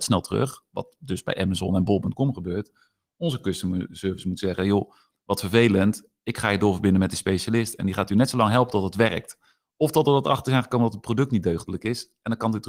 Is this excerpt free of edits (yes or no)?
yes